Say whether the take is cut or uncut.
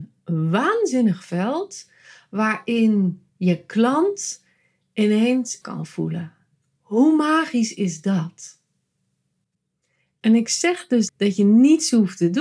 cut